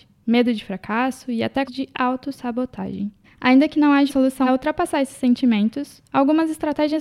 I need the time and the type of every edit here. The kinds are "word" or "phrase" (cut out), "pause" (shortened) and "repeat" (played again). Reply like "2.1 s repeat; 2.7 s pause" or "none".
1.7 s word; 3.2 s pause; 4.1 s word; 4.5 s phrase